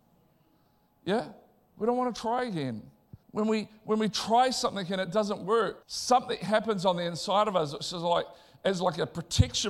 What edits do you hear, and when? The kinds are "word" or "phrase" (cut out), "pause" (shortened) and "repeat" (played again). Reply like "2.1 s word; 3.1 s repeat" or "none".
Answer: 3.2 s pause; 5.8 s pause